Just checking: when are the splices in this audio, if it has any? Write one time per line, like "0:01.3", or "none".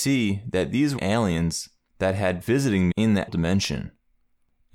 0:01.0
0:02.4
0:02.9
0:03.3